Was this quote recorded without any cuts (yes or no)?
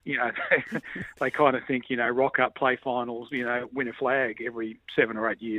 yes